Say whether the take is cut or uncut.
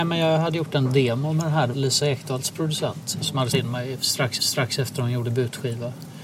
cut